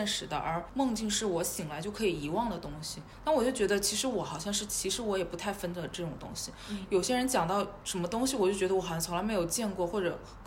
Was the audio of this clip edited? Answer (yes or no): yes